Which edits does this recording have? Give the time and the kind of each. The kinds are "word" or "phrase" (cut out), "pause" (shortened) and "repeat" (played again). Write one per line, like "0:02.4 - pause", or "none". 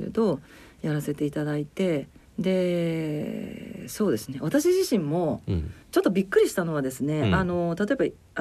0:02.2 - pause
0:05.8 - pause